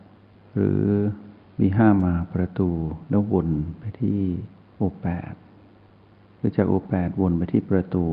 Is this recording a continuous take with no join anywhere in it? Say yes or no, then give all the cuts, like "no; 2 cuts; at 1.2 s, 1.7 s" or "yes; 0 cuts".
yes; 0 cuts